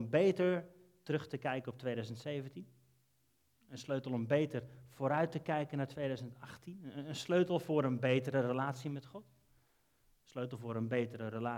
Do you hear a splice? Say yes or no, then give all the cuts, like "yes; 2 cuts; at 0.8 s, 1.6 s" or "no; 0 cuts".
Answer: no; 0 cuts